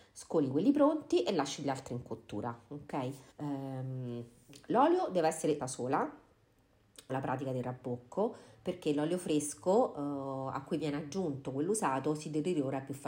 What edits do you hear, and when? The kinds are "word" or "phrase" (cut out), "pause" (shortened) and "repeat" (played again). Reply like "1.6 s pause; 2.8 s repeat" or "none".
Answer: 3.3 s pause; 5.6 s phrase; 7.1 s word